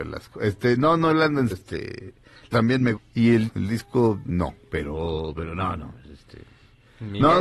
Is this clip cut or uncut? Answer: cut